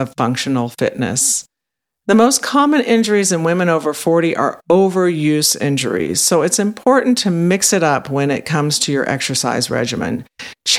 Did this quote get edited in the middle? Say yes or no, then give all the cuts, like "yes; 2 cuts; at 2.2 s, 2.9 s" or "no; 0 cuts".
no; 0 cuts